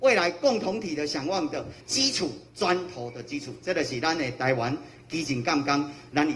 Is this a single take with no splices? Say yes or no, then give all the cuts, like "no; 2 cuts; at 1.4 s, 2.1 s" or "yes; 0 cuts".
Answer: no; 2 cuts; at 1.8 s, 2.5 s